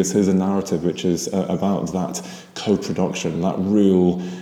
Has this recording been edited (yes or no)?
no